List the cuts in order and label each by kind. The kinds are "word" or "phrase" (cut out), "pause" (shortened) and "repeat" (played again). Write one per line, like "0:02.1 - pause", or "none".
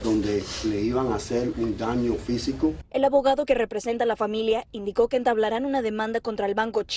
none